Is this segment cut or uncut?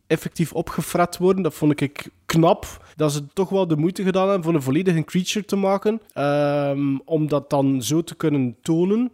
cut